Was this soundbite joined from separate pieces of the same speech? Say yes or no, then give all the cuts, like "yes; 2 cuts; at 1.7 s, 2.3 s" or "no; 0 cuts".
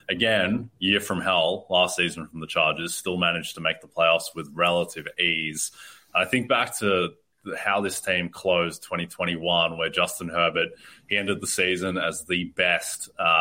no; 0 cuts